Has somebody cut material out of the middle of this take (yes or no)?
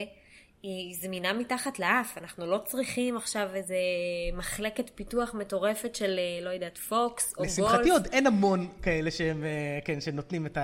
no